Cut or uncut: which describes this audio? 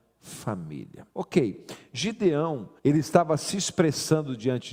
cut